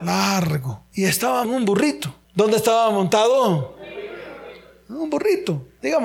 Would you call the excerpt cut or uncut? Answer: cut